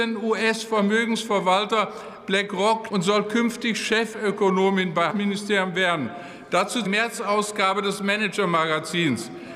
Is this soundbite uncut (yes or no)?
no